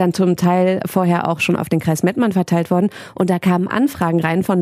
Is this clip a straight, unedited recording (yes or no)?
yes